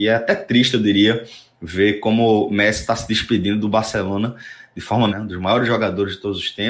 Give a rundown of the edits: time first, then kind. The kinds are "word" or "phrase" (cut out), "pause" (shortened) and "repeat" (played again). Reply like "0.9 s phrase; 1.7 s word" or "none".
5.1 s word